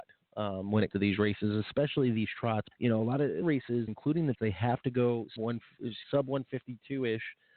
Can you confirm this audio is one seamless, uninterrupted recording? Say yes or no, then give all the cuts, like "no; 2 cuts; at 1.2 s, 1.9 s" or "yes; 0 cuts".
no; 7 cuts; at 0.9 s, 2.7 s, 3.4 s, 3.9 s, 4.3 s, 5.4 s, 6.0 s